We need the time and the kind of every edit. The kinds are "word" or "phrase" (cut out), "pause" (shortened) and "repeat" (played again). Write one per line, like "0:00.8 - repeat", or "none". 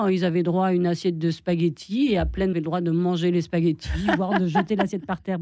0:02.5 - phrase